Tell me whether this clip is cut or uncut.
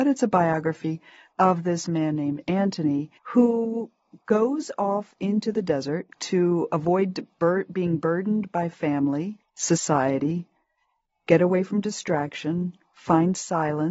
cut